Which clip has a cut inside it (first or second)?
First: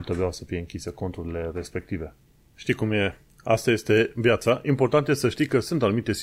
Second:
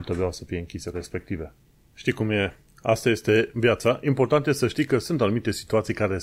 second